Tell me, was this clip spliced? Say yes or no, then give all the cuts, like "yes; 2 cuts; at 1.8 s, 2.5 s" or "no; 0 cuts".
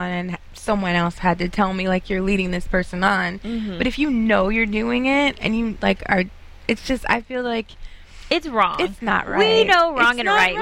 no; 0 cuts